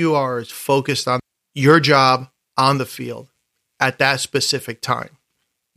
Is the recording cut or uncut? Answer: uncut